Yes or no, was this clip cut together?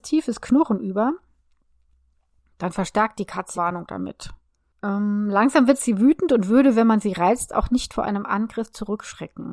yes